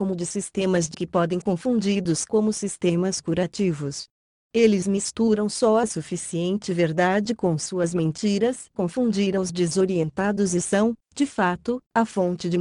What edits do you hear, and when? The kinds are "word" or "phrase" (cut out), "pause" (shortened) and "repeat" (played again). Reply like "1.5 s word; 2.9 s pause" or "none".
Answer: 0.9 s word; 1.4 s word; 8.7 s word